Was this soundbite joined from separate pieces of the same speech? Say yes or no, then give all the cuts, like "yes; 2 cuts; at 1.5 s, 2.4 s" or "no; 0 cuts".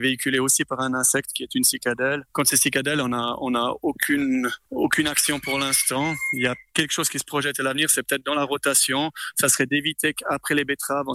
no; 0 cuts